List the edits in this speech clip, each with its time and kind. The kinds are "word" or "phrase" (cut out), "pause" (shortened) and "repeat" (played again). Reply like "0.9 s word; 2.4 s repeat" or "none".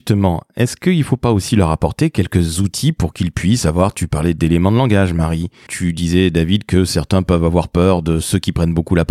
5.7 s word